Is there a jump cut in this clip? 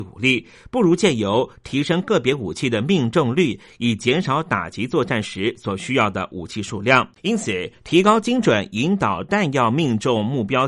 yes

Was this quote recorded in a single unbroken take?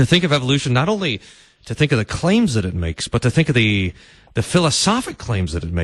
yes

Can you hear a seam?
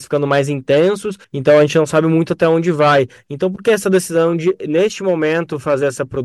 yes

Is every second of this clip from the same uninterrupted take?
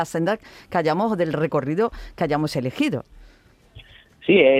yes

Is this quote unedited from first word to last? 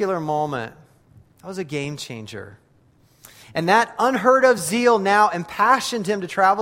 yes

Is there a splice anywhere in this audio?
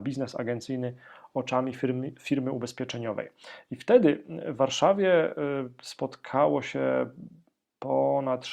no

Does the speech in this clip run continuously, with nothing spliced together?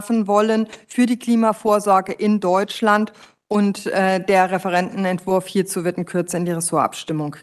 yes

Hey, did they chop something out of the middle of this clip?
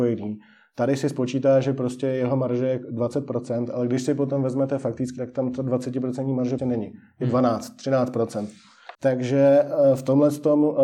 yes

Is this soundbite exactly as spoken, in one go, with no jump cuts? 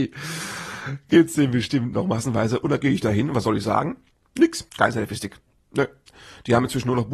no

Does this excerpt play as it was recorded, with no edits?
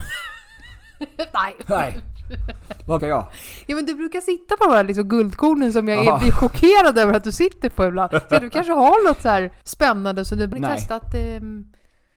no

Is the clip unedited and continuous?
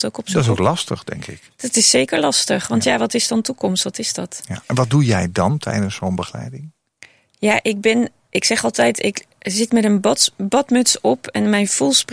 yes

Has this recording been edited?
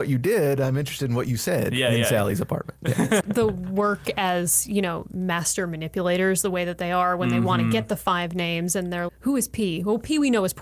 yes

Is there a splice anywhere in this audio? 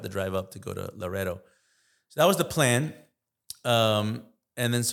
no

